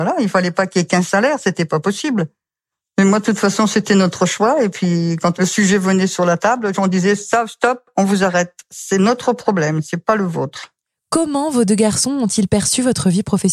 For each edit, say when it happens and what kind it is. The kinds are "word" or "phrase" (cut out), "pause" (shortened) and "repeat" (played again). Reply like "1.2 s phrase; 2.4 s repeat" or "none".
none